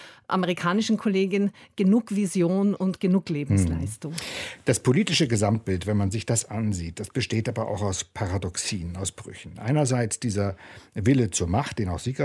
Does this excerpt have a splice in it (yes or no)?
no